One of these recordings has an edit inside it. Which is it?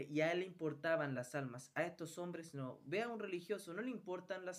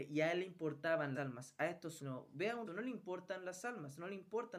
second; 3 cuts; at 1.1 s, 2.0 s, 2.7 s

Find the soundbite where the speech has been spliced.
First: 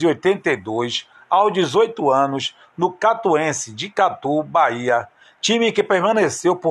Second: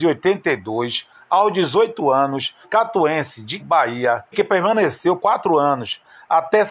second; 4 cuts; at 2.6 s, 3.6 s, 4.3 s, 5.2 s

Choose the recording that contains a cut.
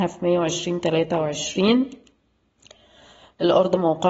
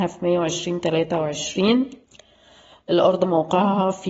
second; 1 cut; at 2.0 s

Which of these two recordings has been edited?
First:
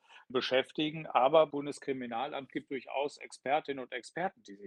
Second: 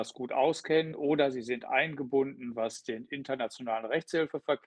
first; 2 cuts; at 1.5 s, 2.7 s

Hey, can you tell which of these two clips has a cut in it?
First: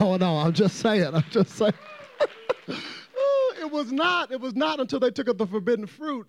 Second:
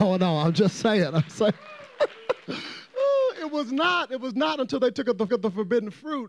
second; 2 cuts; at 1.3 s, 5.3 s

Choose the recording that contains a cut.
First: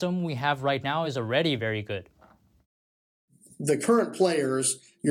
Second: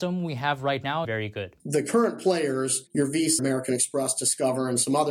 second; 4 cuts; at 1.0 s, 1.6 s, 2.9 s, 3.4 s

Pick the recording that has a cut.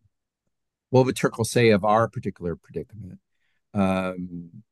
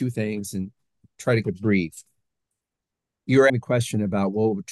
second; 2 cuts; at 1.4 s, 3.5 s

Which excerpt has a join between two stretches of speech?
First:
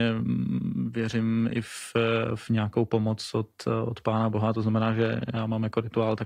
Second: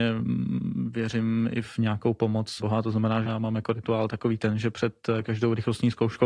second; 3 cuts; at 1.6 s, 2.6 s, 3.2 s

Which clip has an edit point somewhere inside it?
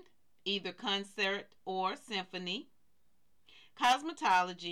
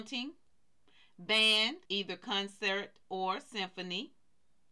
second; 1 cut; at 1.9 s

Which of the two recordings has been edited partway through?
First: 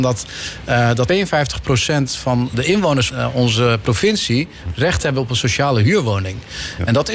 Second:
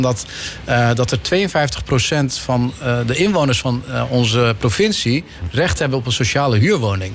first; 3 cuts; at 1.1 s, 2.5 s, 3.1 s

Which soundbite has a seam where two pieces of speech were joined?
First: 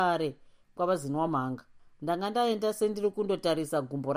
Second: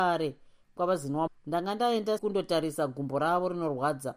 second; 2 cuts; at 1.3 s, 2.2 s

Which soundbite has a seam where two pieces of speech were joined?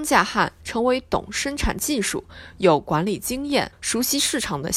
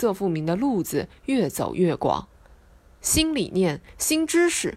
first; 1 cut; at 3.7 s

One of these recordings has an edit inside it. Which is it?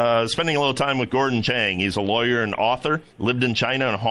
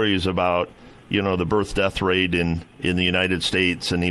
first; 1 cut; at 3.1 s

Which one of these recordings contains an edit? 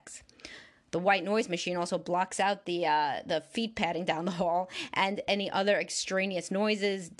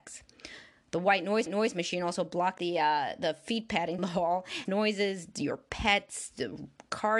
second; 4 cuts; at 1.5 s, 2.6 s, 4.0 s, 4.7 s

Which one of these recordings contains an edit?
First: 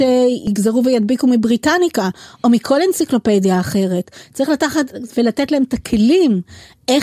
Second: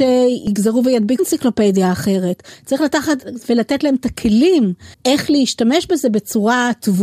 second; 2 cuts; at 1.2 s, 4.9 s

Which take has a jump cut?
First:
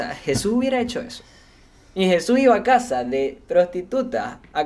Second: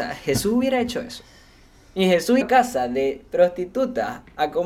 second; 1 cut; at 2.4 s

